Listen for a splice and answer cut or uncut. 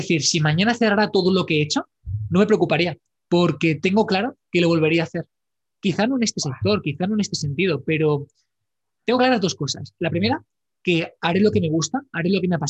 uncut